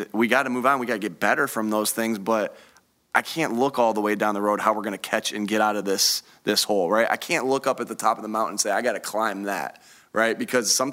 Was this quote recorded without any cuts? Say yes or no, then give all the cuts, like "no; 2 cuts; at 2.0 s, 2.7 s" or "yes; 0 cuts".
yes; 0 cuts